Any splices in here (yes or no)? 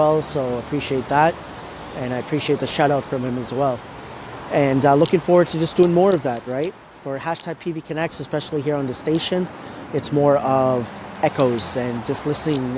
no